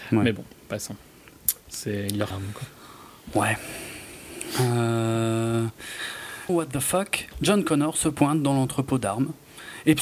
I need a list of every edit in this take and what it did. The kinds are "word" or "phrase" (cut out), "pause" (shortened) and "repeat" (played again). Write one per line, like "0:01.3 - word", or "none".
0:01.6 - pause
0:02.3 - phrase
0:06.5 - word